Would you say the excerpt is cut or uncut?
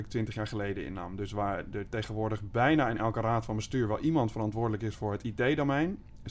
uncut